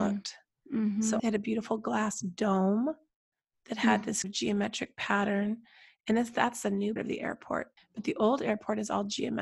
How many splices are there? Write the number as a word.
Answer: four